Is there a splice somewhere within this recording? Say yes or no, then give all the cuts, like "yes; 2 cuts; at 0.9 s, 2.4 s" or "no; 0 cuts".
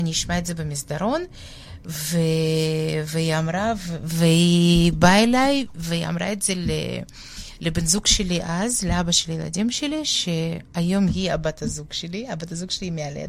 yes; 1 cut; at 10.7 s